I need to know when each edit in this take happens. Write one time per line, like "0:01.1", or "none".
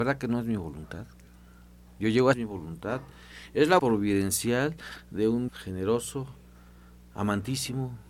0:02.3
0:03.8
0:05.5